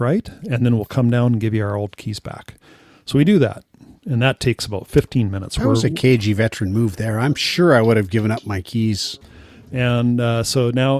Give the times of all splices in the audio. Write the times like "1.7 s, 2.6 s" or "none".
none